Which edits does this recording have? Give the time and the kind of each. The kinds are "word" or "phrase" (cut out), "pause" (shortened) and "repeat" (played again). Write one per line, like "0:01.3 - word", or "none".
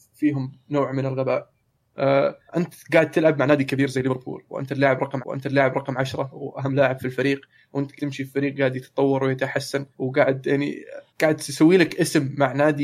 0:02.5 - pause
0:05.2 - repeat
0:08.0 - word
0:09.9 - pause
0:11.1 - pause